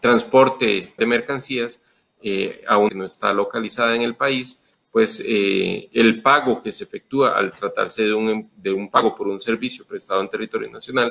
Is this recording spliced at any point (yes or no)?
yes